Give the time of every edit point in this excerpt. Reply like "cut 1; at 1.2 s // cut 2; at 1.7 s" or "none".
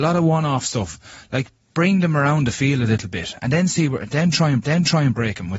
cut 1; at 4.6 s